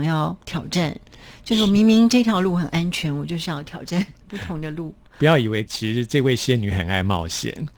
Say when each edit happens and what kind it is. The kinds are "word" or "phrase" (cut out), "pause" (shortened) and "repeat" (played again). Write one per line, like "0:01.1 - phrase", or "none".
0:04.2 - pause
0:05.7 - phrase